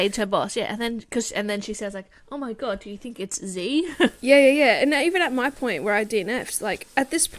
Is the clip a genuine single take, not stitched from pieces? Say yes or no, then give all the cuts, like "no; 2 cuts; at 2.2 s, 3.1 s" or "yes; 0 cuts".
yes; 0 cuts